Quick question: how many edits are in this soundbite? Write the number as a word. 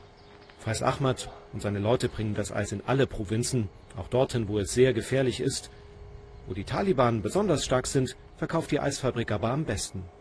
one